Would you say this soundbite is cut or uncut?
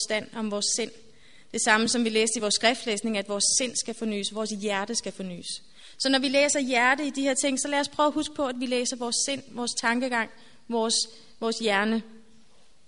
uncut